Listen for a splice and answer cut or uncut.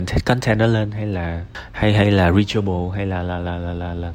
uncut